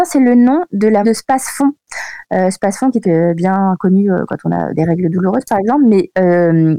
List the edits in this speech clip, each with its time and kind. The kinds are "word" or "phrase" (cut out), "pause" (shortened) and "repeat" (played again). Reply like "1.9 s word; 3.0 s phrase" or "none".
1.0 s word; 3.0 s phrase